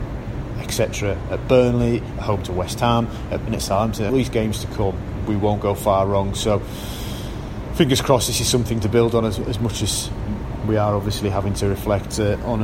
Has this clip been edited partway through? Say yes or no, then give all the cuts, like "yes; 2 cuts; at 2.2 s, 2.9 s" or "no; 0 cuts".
yes; 2 cuts; at 3.5 s, 4.1 s